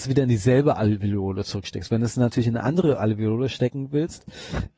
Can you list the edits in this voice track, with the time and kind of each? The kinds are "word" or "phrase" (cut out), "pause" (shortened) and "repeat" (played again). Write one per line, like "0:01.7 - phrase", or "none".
none